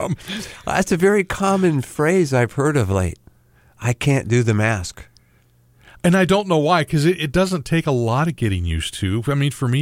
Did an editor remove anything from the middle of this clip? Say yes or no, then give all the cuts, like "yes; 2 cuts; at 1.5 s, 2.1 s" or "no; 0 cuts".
no; 0 cuts